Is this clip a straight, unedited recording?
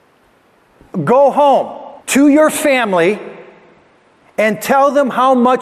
no; 1 cut; at 2.0 s

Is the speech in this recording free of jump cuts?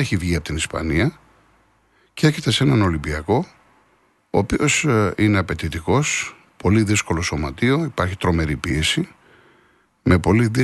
yes; 0 cuts

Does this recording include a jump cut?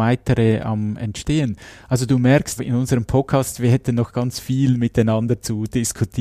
yes; 1 cut; at 2.6 s

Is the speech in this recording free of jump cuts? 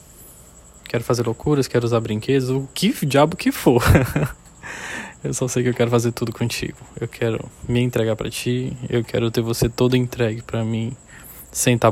no; 1 cut; at 4.4 s

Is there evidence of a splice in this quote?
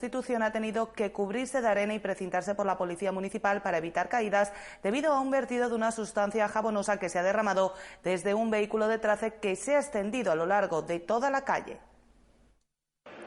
no; 0 cuts

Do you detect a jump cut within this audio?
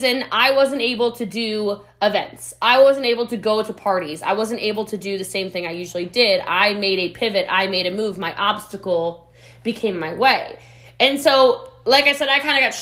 no; 0 cuts

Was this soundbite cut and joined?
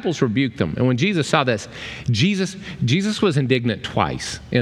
no; 0 cuts

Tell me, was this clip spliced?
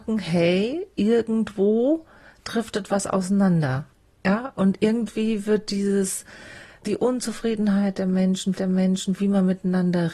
yes; 2 cuts; at 6.8 s, 8.6 s

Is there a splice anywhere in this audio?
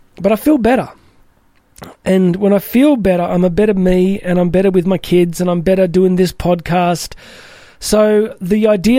no; 0 cuts

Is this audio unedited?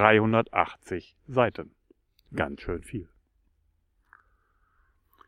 yes; 0 cuts

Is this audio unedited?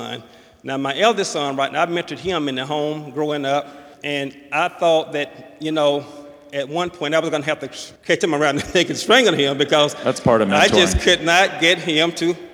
no; 2 cuts; at 3.9 s, 8.0 s

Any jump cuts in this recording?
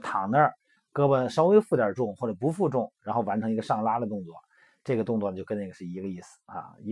no; 0 cuts

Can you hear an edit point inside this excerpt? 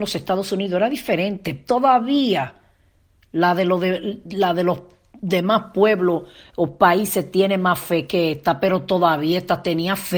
no; 0 cuts

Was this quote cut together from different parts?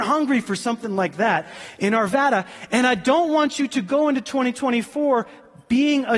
no; 0 cuts

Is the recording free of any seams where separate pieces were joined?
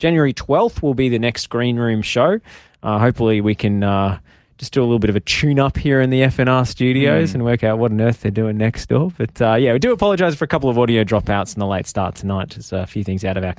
yes; 0 cuts

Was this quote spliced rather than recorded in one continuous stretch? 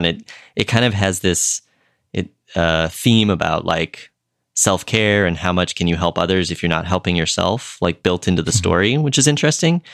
no; 0 cuts

